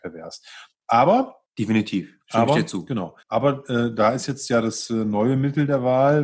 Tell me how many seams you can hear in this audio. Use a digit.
2